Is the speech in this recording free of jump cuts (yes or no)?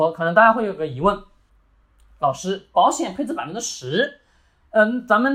yes